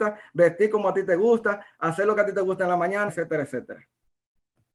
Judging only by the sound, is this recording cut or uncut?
cut